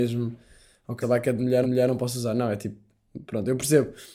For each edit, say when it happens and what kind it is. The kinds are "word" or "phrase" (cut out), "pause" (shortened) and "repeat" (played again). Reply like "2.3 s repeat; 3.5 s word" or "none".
1.0 s word; 1.6 s repeat